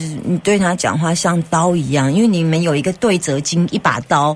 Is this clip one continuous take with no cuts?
yes; 0 cuts

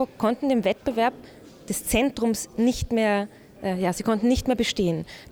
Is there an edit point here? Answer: no; 0 cuts

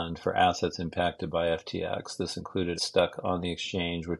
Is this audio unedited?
no; 1 cut; at 2.8 s

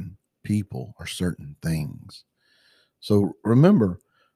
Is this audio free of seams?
yes; 0 cuts

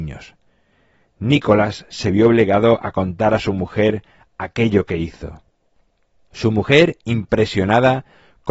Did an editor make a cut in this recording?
no; 0 cuts

